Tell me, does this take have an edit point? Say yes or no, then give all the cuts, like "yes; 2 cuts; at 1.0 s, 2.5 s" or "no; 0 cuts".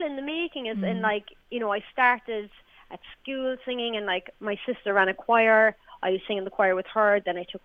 no; 0 cuts